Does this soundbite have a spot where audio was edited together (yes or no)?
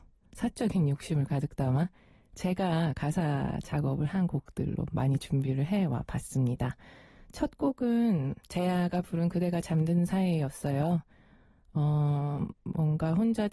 no